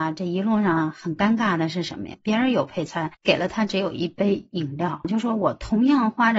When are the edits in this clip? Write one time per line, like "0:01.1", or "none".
0:03.1